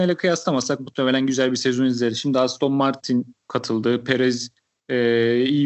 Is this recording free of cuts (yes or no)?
yes